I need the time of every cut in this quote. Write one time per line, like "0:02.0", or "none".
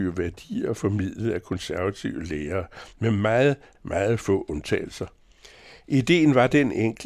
0:03.7